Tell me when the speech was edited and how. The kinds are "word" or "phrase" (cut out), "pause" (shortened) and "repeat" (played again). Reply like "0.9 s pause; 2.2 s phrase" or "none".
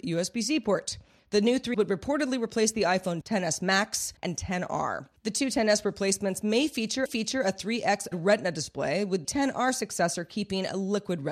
1.7 s word; 3.2 s word; 4.2 s pause; 7.1 s repeat; 8.1 s word; 9.2 s word